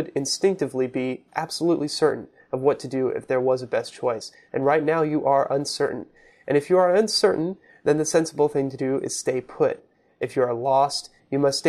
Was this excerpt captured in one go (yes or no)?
yes